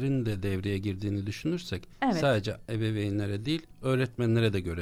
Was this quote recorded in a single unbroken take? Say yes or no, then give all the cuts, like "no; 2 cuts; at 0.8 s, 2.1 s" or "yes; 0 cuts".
yes; 0 cuts